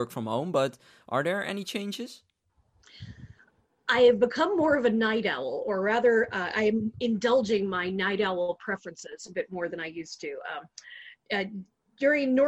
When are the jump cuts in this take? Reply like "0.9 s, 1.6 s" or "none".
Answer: none